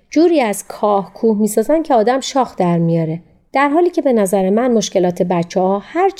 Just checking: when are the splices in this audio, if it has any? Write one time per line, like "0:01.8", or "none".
none